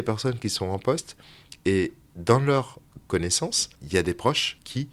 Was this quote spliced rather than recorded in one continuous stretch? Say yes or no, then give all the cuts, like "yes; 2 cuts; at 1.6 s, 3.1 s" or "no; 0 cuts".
no; 0 cuts